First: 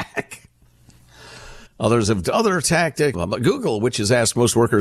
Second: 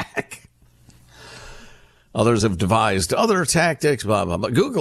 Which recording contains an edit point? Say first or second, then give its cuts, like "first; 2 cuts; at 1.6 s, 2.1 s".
first; 3 cuts; at 1.7 s, 2.2 s, 3.1 s